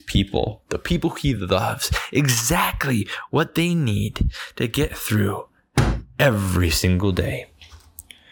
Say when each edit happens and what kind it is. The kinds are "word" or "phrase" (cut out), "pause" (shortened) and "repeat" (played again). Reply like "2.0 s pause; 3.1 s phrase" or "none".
none